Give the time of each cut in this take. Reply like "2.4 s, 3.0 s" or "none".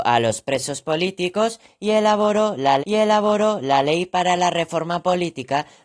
2.8 s